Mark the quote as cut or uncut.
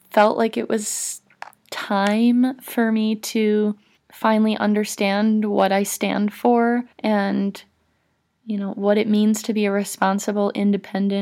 cut